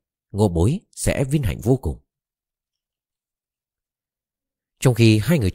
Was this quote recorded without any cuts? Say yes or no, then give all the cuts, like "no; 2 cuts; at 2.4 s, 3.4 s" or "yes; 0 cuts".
yes; 0 cuts